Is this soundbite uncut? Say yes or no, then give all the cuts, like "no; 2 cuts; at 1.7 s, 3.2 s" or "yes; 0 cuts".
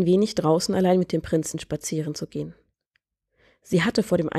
yes; 0 cuts